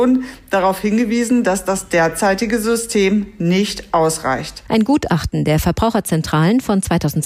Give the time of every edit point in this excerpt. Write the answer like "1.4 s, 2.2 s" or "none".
none